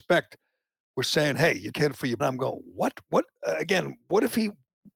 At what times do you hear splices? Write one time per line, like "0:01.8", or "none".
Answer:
0:01.7
0:02.2